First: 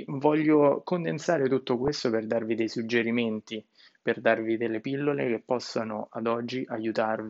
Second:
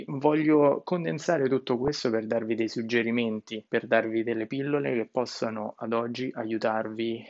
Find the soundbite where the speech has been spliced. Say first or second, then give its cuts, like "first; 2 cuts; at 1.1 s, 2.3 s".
second; 1 cut; at 3.7 s